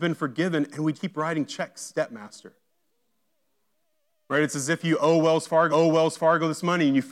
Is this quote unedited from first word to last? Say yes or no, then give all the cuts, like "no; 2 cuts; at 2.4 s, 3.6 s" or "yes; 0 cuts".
no; 3 cuts; at 0.9 s, 1.9 s, 5.7 s